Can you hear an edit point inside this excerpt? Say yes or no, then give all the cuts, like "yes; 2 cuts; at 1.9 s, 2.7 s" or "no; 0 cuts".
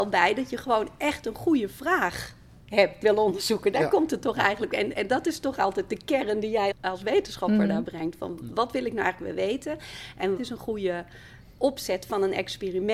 yes; 4 cuts; at 3.0 s, 4.9 s, 6.7 s, 10.4 s